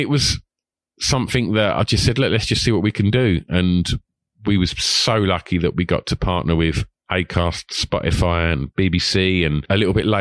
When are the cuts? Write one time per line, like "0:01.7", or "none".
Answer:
none